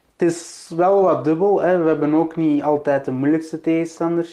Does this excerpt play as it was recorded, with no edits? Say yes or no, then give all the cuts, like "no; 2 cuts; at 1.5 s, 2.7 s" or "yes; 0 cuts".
yes; 0 cuts